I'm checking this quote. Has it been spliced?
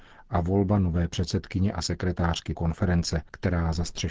yes; 1 cut; at 2.6 s

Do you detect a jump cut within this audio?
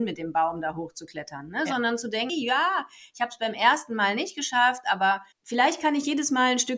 yes; 2 cuts; at 2.3 s, 5.3 s

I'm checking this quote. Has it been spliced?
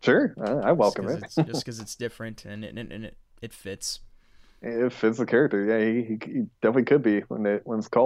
no; 0 cuts

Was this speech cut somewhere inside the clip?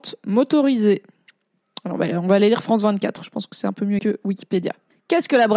yes; 1 cut; at 4.0 s

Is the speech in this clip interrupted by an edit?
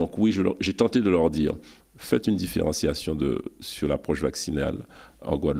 no; 0 cuts

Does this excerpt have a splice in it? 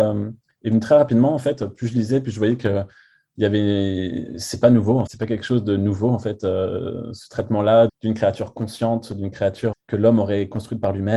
yes; 3 cuts; at 5.1 s, 7.9 s, 9.7 s

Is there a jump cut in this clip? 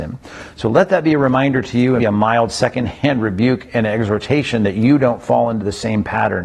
yes; 1 cut; at 2.0 s

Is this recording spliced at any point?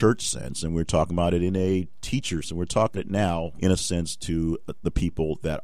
yes; 3 cuts; at 2.4 s, 3.0 s, 3.6 s

